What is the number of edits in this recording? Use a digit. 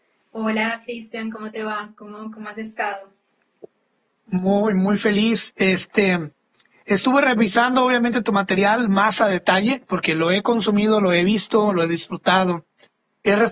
0